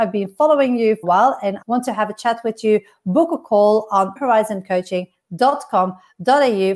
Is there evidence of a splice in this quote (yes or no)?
yes